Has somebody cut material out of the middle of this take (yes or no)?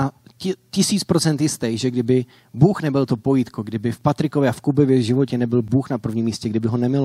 no